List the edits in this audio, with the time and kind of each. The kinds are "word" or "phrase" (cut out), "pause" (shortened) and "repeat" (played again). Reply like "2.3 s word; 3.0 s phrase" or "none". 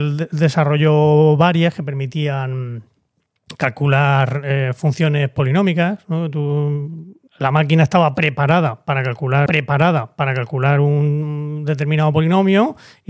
7.3 s pause; 9.5 s repeat